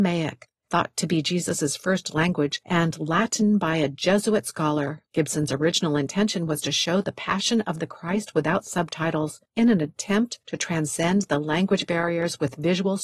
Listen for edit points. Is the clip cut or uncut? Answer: cut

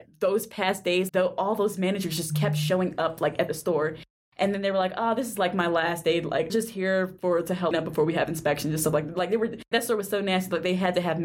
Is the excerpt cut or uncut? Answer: cut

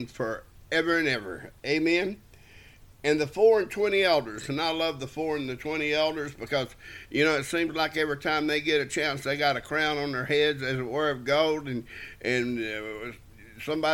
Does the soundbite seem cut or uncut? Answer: uncut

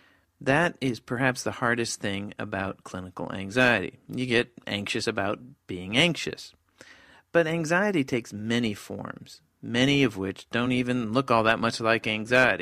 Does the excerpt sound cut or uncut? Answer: uncut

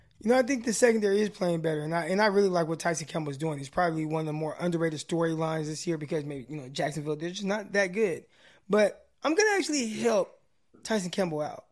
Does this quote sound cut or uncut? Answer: uncut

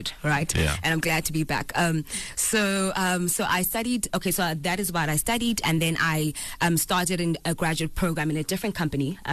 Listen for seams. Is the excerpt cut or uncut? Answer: uncut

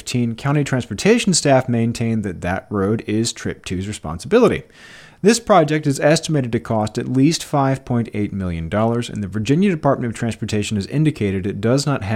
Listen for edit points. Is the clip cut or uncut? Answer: uncut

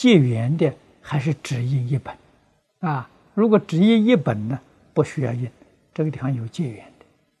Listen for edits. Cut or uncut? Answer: cut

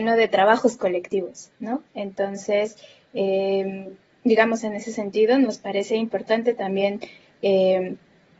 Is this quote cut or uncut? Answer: uncut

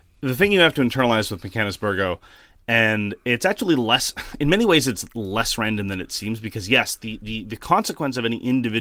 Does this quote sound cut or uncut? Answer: uncut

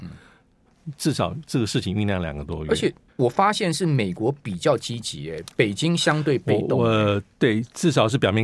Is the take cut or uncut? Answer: cut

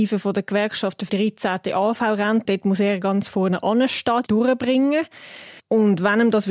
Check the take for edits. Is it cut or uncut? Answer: cut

